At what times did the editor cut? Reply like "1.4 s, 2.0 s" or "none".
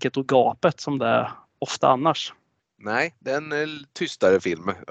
none